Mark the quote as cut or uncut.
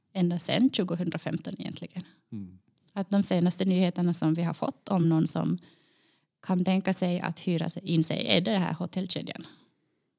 uncut